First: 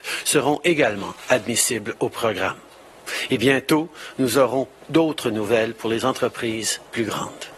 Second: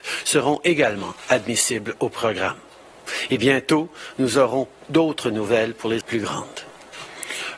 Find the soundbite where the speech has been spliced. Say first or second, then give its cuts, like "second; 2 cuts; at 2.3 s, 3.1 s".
second; 1 cut; at 6.0 s